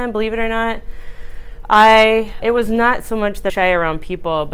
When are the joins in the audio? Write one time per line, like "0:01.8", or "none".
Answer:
0:02.4
0:03.5